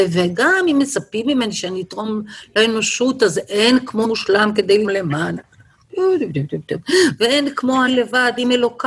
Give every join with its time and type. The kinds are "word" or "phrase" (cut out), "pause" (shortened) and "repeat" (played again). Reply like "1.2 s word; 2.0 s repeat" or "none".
4.0 s word; 4.8 s word; 7.9 s word